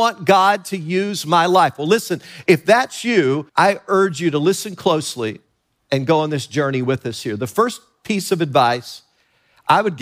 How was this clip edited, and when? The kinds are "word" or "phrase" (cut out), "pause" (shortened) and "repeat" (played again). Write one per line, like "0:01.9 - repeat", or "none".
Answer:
0:03.5 - pause